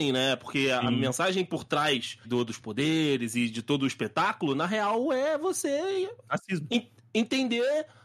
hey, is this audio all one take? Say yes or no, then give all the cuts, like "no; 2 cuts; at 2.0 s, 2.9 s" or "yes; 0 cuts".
no; 1 cut; at 2.2 s